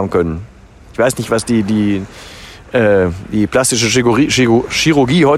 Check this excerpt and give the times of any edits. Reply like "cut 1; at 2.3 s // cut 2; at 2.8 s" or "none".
none